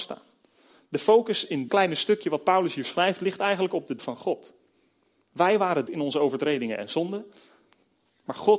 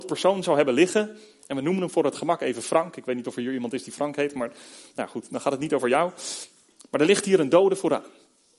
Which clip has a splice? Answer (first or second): first